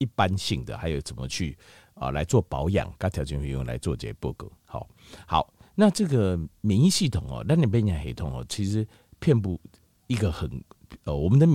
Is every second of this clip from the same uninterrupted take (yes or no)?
yes